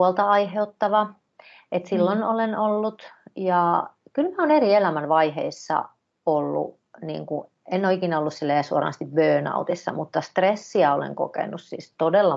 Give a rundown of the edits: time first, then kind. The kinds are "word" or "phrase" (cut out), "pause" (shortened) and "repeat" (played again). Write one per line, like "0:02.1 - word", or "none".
none